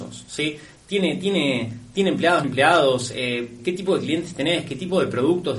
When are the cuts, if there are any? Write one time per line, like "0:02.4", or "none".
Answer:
0:02.4
0:03.6